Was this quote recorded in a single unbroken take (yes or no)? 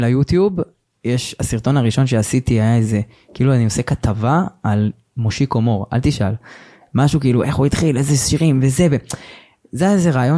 yes